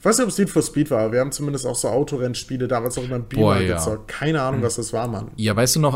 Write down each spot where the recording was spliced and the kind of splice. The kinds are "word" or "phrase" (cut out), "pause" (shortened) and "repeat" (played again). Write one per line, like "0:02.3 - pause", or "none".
none